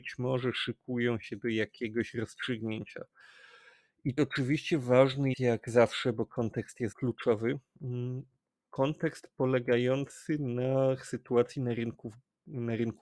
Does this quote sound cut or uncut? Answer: cut